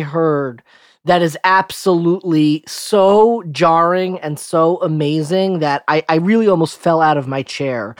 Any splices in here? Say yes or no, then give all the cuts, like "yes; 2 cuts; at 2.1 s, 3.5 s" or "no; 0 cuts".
no; 0 cuts